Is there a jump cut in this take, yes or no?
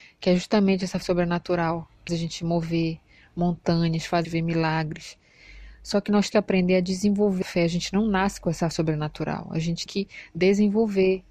yes